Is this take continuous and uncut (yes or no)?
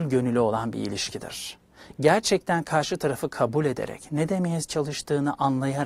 yes